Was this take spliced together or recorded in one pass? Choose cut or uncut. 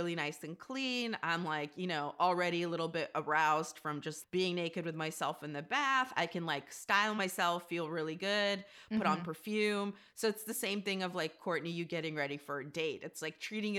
uncut